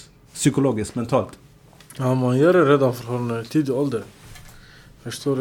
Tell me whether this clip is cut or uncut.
uncut